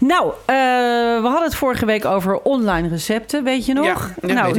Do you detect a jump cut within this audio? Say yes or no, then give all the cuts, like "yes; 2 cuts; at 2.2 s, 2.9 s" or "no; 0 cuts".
no; 0 cuts